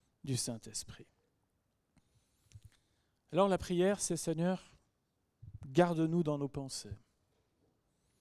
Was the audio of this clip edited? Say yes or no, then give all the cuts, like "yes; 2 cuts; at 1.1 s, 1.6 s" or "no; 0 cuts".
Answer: no; 0 cuts